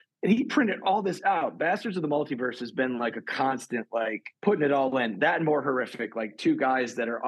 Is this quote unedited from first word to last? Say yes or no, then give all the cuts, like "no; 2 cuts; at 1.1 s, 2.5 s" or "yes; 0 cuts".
no; 1 cut; at 4.4 s